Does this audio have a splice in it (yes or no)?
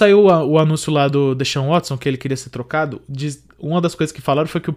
no